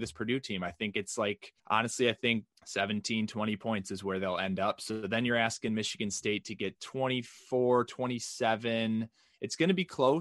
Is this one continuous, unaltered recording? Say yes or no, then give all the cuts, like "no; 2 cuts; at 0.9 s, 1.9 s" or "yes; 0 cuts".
no; 2 cuts; at 1.6 s, 2.5 s